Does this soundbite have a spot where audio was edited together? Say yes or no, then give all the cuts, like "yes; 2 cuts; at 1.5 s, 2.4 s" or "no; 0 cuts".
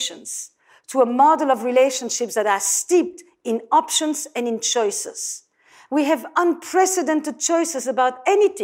no; 0 cuts